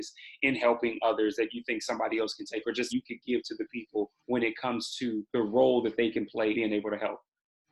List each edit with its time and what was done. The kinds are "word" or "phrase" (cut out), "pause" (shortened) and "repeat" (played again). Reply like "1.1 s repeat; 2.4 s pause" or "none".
2.9 s phrase; 4.2 s pause; 5.3 s pause; 6.5 s word